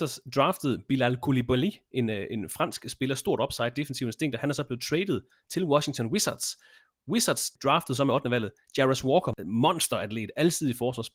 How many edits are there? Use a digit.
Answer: 0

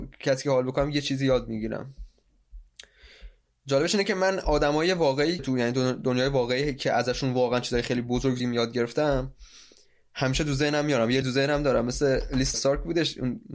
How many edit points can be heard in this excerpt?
4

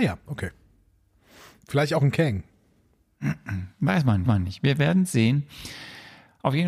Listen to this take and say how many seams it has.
1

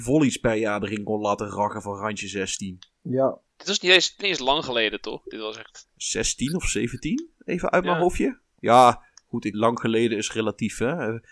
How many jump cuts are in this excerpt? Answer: 2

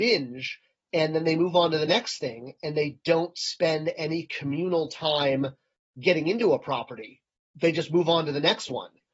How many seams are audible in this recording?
0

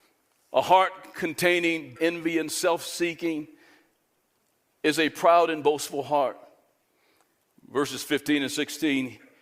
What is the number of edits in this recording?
1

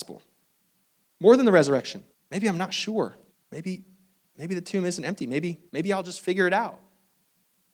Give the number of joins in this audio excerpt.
3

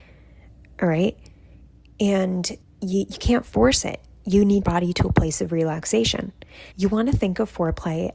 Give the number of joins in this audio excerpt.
3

